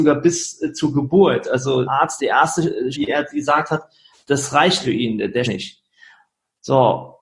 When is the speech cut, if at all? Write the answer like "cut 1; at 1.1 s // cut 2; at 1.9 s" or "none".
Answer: cut 1; at 1.8 s // cut 2; at 2.2 s // cut 3; at 2.9 s // cut 4; at 4.1 s // cut 5; at 4.8 s // cut 6; at 5.4 s